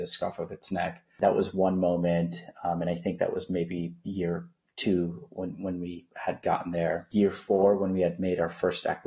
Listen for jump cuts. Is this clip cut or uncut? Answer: uncut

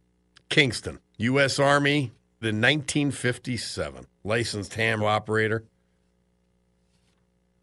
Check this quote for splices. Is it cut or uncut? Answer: cut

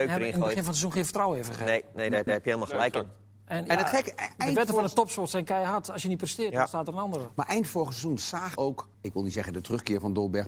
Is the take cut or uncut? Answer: cut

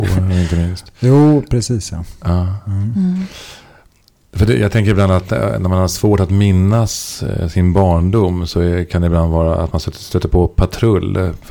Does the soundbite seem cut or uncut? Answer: uncut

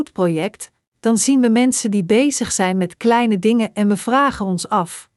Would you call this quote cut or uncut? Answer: uncut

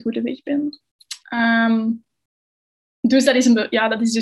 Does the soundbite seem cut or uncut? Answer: cut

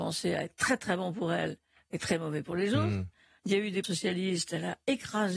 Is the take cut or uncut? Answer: cut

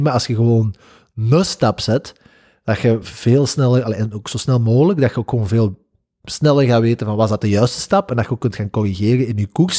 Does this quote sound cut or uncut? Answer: uncut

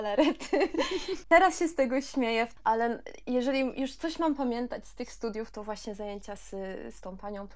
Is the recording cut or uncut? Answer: uncut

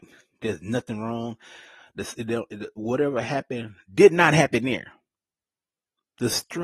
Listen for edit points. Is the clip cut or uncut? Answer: uncut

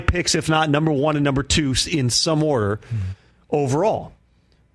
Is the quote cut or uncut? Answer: uncut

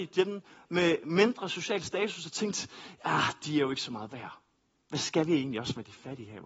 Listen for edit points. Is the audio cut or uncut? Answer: uncut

